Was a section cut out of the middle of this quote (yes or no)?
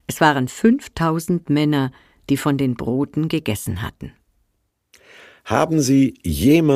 no